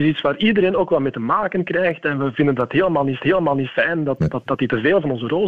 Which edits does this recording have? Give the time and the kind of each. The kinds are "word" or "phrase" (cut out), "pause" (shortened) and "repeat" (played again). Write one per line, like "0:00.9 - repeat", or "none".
0:03.2 - repeat
0:04.5 - word